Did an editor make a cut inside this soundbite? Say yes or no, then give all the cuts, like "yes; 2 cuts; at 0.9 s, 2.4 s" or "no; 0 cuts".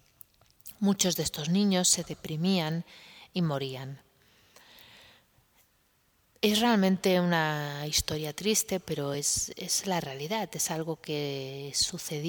no; 0 cuts